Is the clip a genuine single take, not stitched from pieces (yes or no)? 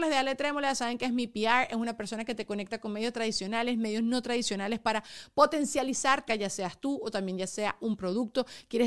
no